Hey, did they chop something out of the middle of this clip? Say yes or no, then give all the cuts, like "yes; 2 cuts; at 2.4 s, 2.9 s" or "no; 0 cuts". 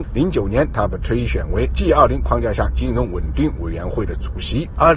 no; 0 cuts